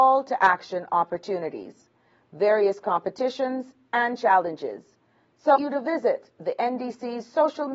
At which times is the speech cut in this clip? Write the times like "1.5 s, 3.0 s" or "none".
5.5 s